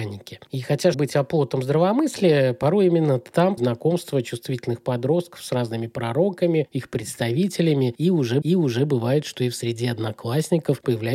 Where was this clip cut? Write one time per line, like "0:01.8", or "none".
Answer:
0:00.9
0:03.6
0:08.4